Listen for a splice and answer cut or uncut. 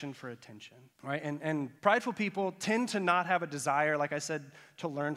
cut